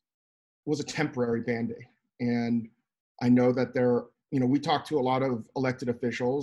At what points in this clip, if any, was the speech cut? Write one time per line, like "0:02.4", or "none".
none